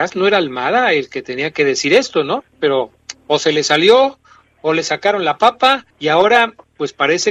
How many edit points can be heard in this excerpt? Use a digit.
1